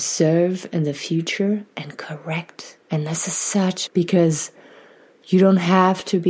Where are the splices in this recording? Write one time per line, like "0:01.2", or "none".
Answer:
0:02.8
0:03.9